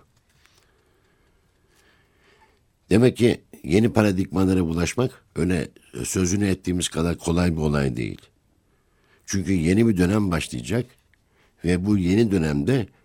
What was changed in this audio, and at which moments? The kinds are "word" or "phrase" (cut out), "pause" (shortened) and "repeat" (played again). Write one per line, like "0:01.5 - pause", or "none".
none